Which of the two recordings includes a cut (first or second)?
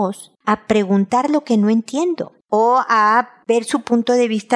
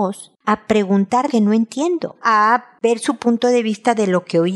second